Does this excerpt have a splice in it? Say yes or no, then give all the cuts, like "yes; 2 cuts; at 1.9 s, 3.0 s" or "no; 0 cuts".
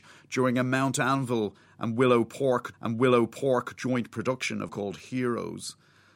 yes; 2 cuts; at 2.7 s, 4.7 s